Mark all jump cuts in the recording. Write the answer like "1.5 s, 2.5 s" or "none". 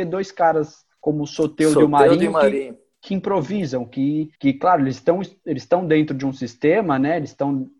0.9 s, 4.3 s